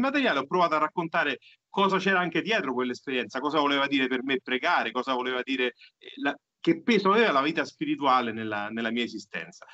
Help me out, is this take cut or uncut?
uncut